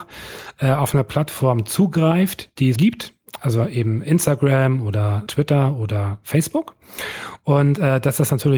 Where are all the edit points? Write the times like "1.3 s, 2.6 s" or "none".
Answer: 2.8 s, 5.3 s